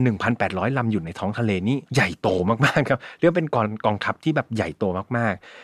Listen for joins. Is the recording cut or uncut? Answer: cut